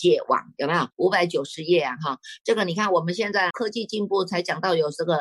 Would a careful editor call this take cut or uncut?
cut